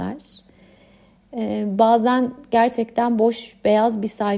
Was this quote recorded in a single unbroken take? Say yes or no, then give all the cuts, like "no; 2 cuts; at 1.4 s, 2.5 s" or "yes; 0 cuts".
yes; 0 cuts